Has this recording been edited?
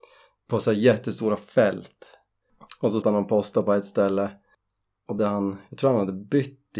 yes; 2 cuts; at 3.0 s, 5.2 s

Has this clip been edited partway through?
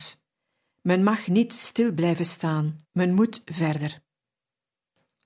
yes; 1 cut; at 2.8 s

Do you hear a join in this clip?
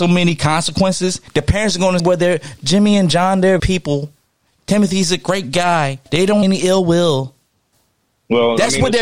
yes; 6 cuts; at 1.3 s, 2.0 s, 3.6 s, 6.1 s, 6.4 s, 7.7 s

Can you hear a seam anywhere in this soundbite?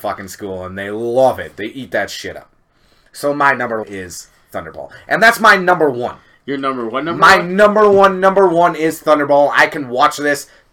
yes; 1 cut; at 3.8 s

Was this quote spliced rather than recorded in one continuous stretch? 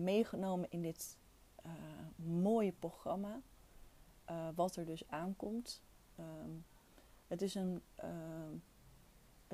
no; 0 cuts

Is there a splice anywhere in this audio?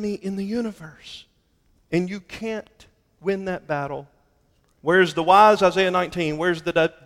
no; 0 cuts

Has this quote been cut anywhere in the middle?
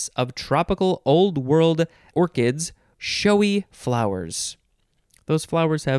yes; 2 cuts; at 2.1 s, 2.9 s

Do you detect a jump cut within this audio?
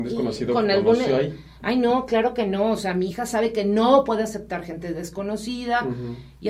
no; 0 cuts

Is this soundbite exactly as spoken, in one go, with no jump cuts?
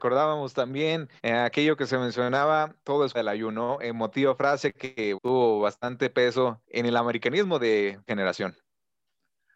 no; 6 cuts; at 1.2 s, 2.8 s, 3.1 s, 5.1 s, 6.6 s, 8.1 s

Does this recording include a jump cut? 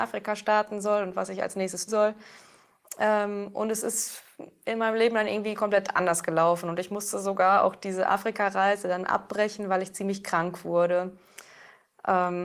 yes; 1 cut; at 1.9 s

